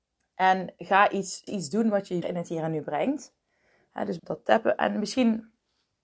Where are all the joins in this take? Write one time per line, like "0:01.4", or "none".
0:01.5
0:02.2
0:04.2